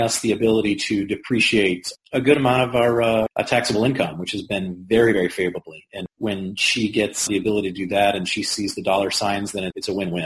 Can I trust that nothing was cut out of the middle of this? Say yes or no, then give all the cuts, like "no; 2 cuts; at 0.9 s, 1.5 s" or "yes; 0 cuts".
yes; 0 cuts